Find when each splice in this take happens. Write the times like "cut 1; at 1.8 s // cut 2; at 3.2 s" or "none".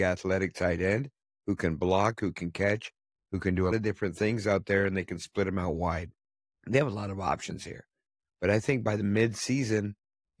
cut 1; at 3.7 s

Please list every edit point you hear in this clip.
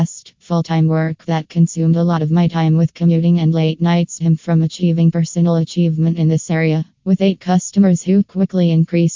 cut 1; at 4.2 s // cut 2; at 6.9 s

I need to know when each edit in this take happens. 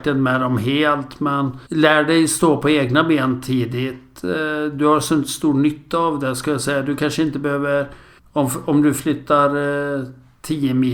cut 1; at 1.7 s // cut 2; at 8.2 s

